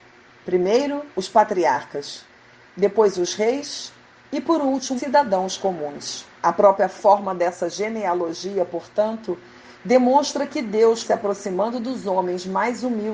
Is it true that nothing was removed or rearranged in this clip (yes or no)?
no